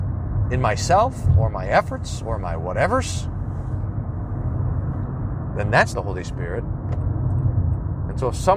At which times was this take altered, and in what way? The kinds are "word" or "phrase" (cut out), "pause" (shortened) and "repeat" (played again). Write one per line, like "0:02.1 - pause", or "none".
0:05.9 - word